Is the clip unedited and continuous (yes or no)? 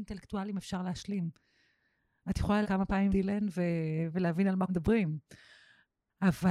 no